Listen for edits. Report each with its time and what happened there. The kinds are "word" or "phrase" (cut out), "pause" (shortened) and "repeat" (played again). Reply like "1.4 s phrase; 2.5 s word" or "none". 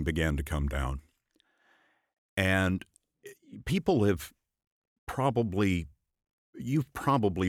none